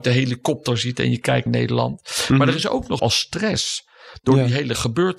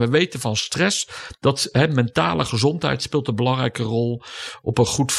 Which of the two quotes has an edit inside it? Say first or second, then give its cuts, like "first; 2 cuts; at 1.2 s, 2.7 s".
first; 2 cuts; at 1.5 s, 3.0 s